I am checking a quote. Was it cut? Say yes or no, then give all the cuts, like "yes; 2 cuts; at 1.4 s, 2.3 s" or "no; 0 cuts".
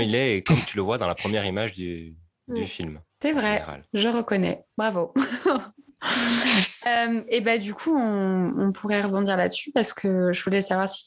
yes; 1 cut; at 3.1 s